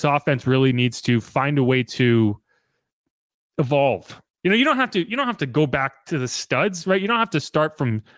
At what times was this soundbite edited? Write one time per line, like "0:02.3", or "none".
0:04.3